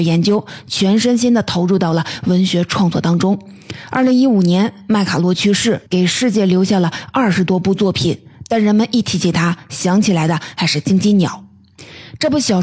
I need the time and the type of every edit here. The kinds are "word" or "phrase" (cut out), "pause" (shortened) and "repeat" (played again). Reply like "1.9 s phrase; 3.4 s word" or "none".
5.9 s pause